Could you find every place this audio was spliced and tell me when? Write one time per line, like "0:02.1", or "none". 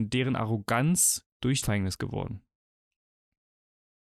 0:01.6